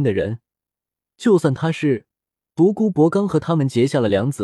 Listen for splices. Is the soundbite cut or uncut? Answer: uncut